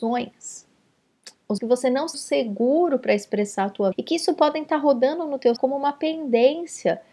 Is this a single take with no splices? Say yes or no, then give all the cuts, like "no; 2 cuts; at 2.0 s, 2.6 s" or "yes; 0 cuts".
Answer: no; 4 cuts; at 1.6 s, 2.1 s, 3.9 s, 5.6 s